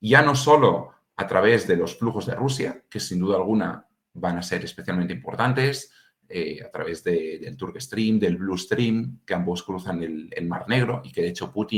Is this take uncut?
yes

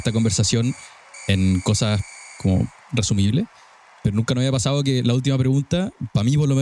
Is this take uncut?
yes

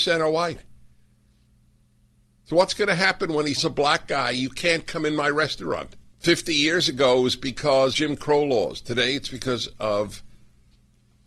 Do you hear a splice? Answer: yes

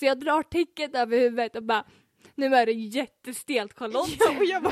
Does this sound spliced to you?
no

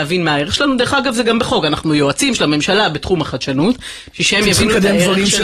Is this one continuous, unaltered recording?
yes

